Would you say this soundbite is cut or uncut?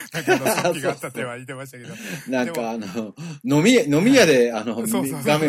uncut